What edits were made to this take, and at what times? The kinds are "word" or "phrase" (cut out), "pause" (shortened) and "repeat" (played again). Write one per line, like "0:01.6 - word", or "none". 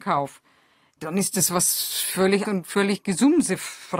0:02.4 - word